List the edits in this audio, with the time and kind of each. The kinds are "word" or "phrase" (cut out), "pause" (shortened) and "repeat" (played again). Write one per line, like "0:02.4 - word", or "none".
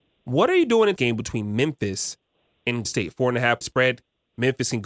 0:01.0 - word
0:02.8 - word
0:03.6 - word